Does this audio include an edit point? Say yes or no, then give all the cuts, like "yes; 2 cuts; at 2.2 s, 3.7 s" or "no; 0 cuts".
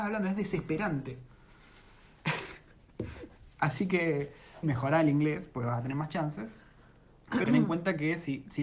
yes; 2 cuts; at 4.6 s, 7.4 s